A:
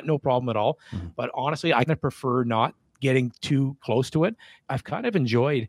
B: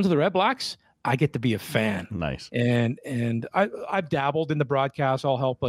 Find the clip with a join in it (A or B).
A